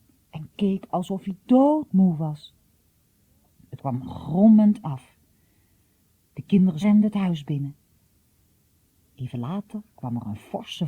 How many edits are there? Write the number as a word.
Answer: three